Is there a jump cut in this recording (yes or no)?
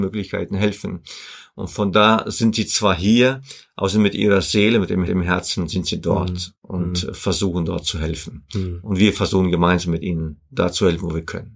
yes